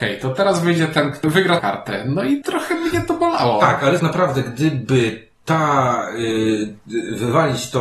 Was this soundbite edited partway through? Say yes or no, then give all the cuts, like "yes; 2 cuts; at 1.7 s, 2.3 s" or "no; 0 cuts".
yes; 4 cuts; at 1.2 s, 1.6 s, 2.4 s, 4.0 s